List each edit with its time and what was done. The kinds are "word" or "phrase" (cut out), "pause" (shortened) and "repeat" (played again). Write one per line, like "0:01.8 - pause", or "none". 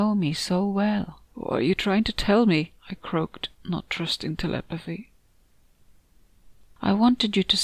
0:01.3 - pause
0:02.8 - pause
0:03.5 - pause